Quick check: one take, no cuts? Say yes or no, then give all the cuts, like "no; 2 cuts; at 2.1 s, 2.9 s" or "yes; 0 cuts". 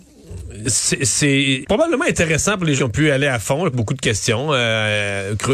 no; 3 cuts; at 1.6 s, 2.8 s, 3.7 s